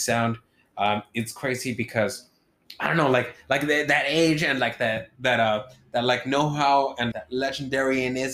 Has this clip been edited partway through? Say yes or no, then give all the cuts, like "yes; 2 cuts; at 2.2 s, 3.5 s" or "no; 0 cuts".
yes; 1 cut; at 7.1 s